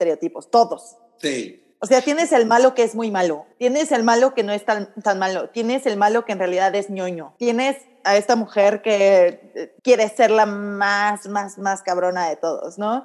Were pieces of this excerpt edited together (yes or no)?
yes